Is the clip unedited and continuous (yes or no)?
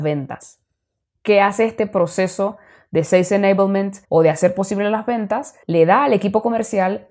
no